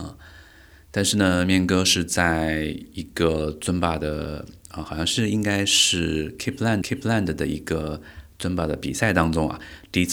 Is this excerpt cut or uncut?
cut